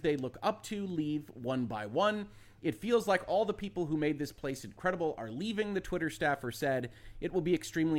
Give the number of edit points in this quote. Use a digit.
0